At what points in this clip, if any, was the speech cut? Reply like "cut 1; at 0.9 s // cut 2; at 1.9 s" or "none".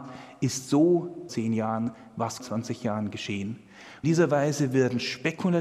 cut 1; at 1.3 s // cut 2; at 2.4 s // cut 3; at 4.0 s